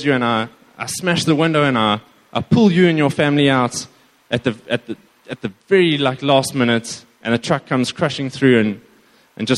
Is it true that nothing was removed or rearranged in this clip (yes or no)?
yes